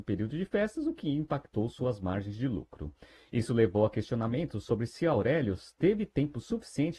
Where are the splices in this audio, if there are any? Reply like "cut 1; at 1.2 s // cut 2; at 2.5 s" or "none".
none